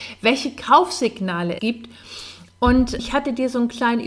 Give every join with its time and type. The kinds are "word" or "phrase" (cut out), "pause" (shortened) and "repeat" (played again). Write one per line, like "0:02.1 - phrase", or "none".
0:01.6 - word
0:03.0 - word